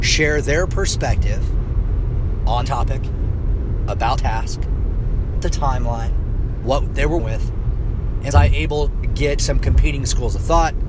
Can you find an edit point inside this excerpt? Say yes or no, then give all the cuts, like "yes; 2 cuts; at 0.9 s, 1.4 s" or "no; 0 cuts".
yes; 8 cuts; at 2.7 s, 4.2 s, 5.4 s, 6.6 s, 7.2 s, 8.3 s, 9.0 s, 9.4 s